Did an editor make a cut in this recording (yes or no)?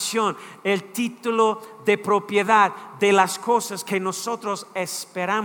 no